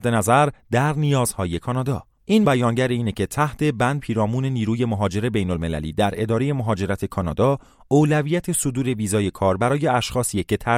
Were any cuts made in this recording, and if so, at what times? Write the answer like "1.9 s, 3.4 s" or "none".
2.4 s, 4.0 s